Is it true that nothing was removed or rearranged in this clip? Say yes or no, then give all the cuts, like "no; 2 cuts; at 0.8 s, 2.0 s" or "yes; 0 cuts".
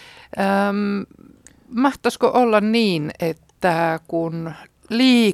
yes; 0 cuts